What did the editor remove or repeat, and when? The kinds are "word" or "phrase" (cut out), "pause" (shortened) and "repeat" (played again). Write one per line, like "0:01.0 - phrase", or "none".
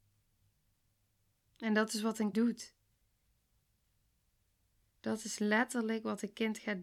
0:02.3 - word

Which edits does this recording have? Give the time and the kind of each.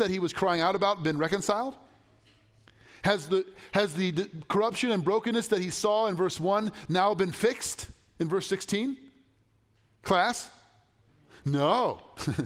none

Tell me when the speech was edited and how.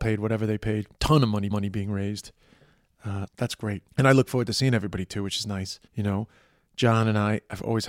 0:00.9 - pause
0:01.5 - repeat
0:03.3 - word
0:03.9 - pause
0:05.9 - pause

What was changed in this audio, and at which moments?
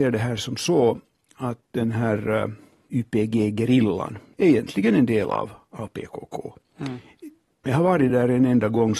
none

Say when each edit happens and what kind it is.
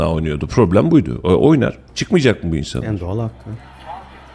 0:01.9 - pause

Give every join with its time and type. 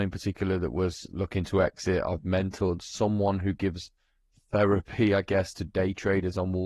none

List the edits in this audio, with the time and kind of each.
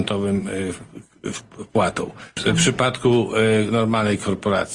0:02.3 - pause

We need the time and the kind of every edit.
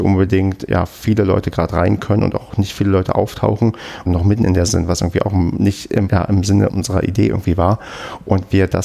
0:04.1 - phrase
0:04.7 - word
0:06.1 - word
0:06.7 - word

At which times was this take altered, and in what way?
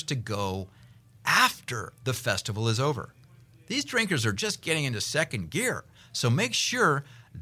none

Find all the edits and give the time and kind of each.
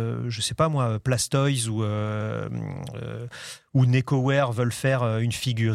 none

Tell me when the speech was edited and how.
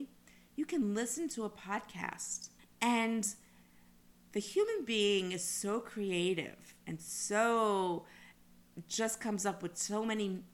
0:02.6 - pause

